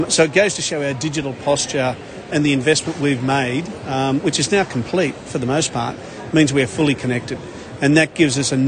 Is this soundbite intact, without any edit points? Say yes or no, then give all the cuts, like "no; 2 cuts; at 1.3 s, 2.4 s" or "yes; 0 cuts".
yes; 0 cuts